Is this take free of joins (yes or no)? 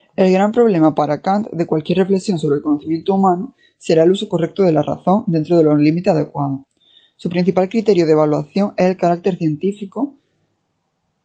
yes